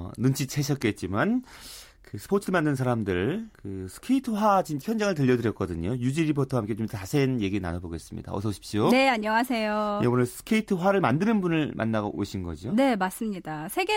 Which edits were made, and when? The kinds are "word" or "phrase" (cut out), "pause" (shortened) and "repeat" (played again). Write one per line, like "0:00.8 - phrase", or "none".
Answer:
0:03.5 - pause
0:04.8 - word